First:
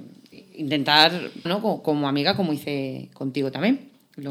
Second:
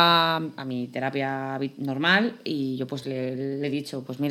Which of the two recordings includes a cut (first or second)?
first